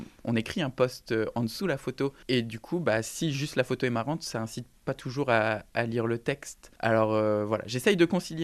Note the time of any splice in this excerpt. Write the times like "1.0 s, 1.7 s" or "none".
2.2 s, 6.8 s